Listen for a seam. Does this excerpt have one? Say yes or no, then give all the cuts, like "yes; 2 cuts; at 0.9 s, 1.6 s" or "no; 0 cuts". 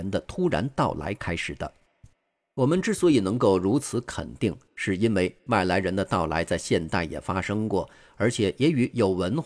no; 0 cuts